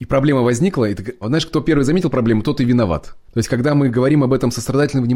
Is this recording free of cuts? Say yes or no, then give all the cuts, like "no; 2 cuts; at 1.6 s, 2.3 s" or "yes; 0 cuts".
no; 2 cuts; at 1.2 s, 3.2 s